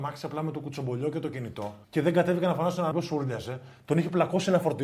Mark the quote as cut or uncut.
cut